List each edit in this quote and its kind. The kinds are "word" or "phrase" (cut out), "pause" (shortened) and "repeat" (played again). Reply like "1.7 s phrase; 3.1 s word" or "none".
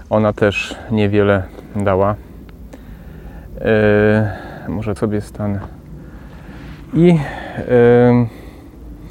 5.0 s word